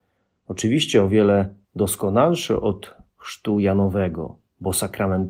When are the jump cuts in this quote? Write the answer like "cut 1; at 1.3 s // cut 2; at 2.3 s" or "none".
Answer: cut 1; at 1.6 s